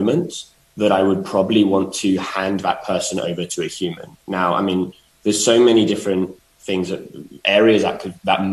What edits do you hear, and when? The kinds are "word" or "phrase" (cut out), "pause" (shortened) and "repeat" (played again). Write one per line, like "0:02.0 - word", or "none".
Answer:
none